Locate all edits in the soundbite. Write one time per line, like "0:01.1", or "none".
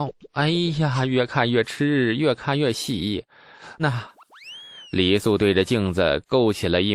0:03.8